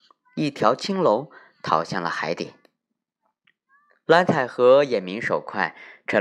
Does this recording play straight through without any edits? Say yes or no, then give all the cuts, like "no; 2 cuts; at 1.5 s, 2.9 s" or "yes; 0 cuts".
yes; 0 cuts